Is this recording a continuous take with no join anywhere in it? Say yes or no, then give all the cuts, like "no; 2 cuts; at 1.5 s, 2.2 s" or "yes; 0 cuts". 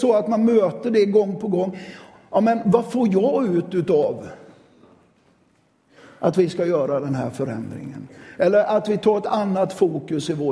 yes; 0 cuts